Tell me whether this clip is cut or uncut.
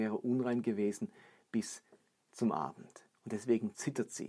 uncut